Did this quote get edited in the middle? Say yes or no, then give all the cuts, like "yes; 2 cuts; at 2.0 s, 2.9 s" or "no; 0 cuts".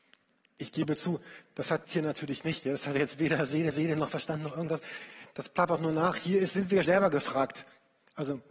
yes; 3 cuts; at 1.8 s, 3.7 s, 6.8 s